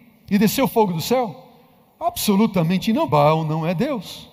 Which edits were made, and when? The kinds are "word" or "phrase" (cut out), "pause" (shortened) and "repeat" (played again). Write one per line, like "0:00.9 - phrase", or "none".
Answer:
0:03.1 - word